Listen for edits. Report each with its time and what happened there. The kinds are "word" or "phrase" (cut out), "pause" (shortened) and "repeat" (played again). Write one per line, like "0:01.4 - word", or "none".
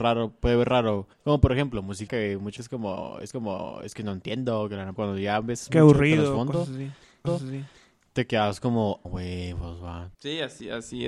0:01.1 - pause
0:02.1 - word
0:02.6 - word
0:03.3 - repeat
0:05.0 - phrase
0:07.2 - repeat
0:09.0 - word
0:10.1 - pause

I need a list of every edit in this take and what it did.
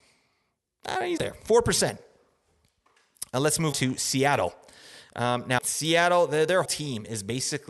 0:01.2 - word
0:03.7 - word
0:05.6 - word
0:06.6 - word

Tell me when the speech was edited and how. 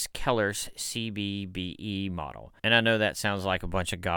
0:02.6 - pause

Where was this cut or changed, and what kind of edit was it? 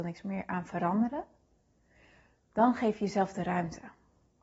none

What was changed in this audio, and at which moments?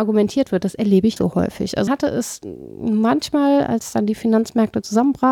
0:01.2 - word
0:01.9 - word

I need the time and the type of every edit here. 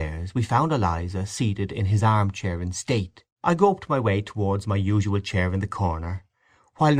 0:03.3 - pause

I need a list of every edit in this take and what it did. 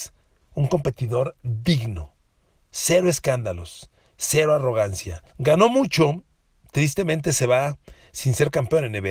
0:05.3 - pause

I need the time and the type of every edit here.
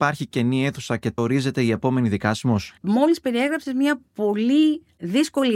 0:01.2 - word
0:02.8 - pause

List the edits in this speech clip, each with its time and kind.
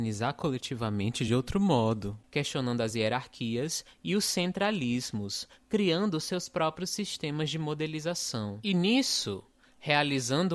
none

